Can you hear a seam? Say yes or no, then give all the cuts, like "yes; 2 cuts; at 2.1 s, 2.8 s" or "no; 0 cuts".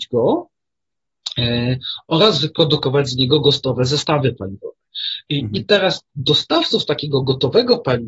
no; 0 cuts